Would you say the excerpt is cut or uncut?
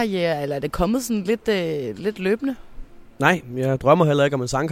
uncut